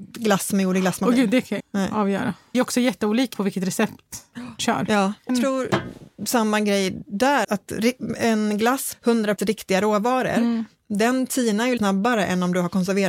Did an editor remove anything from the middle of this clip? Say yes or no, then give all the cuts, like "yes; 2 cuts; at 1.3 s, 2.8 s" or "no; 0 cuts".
yes; 9 cuts; at 1.6 s, 2.5 s, 3.3 s, 4.6 s, 5.3 s, 7.4 s, 8.9 s, 9.4 s, 11.8 s